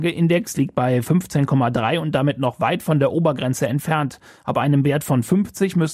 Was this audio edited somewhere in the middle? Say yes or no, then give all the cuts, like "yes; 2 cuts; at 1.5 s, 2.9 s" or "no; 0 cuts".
no; 0 cuts